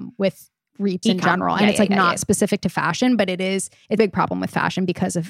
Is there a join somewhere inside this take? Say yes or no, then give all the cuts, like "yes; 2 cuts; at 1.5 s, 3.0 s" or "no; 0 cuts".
yes; 2 cuts; at 1.0 s, 4.0 s